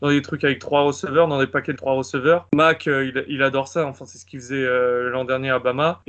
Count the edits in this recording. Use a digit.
1